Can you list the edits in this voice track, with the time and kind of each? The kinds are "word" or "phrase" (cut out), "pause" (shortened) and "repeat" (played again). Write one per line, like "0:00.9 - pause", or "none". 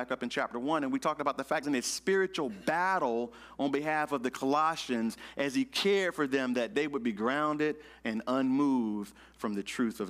0:01.6 - phrase